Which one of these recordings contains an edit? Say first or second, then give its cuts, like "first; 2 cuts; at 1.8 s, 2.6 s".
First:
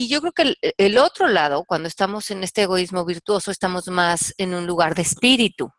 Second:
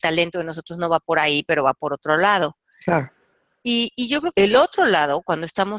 second; 1 cut; at 4.3 s